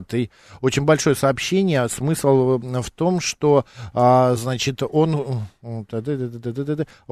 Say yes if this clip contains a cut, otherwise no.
no